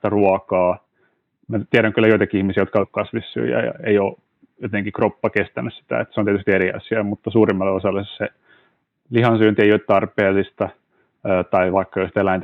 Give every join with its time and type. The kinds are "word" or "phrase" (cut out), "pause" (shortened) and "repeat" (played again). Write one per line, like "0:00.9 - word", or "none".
0:02.8 - word